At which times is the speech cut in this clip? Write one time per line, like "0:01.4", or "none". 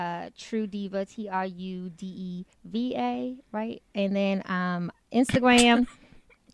0:02.5